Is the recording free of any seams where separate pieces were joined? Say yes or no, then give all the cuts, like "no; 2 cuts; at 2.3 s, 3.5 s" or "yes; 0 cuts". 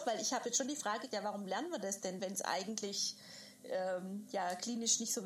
no; 2 cuts; at 1.1 s, 2.2 s